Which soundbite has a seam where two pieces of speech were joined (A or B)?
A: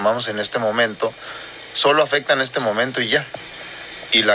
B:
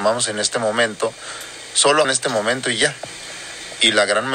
B